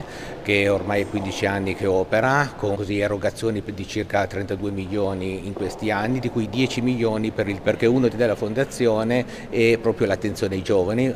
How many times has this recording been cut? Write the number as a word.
three